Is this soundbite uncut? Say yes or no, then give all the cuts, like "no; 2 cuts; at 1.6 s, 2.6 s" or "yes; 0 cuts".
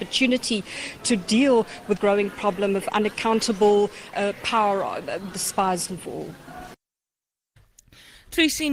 no; 4 cuts; at 2.0 s, 4.1 s, 5.3 s, 5.9 s